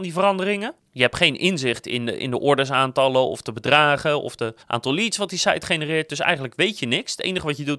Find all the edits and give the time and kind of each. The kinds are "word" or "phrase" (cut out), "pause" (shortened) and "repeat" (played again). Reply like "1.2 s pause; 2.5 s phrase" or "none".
4.6 s pause